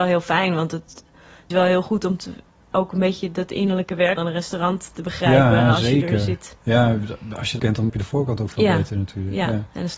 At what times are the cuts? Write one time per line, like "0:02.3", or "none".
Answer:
0:01.5
0:04.2
0:07.6
0:07.9